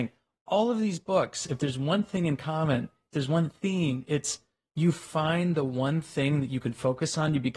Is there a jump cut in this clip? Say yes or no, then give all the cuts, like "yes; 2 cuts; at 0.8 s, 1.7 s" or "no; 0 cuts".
no; 0 cuts